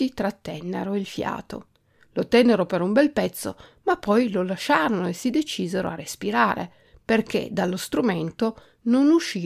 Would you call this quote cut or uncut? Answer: uncut